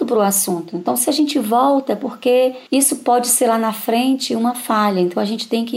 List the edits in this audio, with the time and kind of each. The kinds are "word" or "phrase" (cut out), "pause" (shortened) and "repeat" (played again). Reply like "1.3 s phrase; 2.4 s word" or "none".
2.7 s pause